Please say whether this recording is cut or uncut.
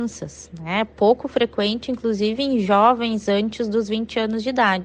uncut